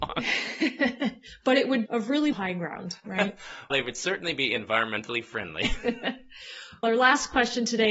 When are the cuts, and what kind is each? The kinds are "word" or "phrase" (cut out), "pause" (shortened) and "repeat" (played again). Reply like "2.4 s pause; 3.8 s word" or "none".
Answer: 1.9 s word; 2.3 s word; 3.7 s word; 6.8 s word